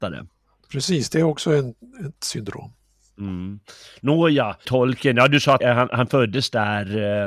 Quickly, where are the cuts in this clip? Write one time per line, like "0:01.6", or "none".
0:04.6
0:05.6